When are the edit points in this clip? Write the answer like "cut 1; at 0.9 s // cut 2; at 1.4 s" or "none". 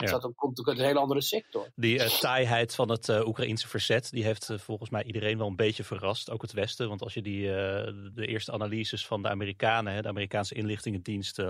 cut 1; at 8.1 s